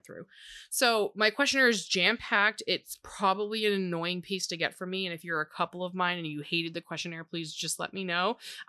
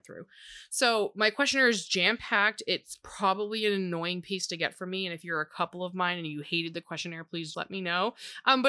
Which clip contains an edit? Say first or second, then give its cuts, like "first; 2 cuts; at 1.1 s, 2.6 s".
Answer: second; 1 cut; at 7.5 s